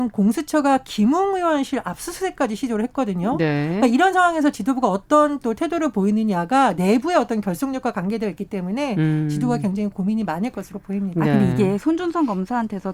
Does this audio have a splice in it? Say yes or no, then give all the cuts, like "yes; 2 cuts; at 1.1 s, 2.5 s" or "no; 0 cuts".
no; 0 cuts